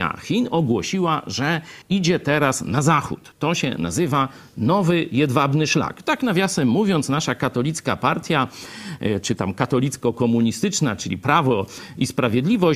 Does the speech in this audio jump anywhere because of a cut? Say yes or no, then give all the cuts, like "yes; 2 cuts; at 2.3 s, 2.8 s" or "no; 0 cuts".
yes; 1 cut; at 1.8 s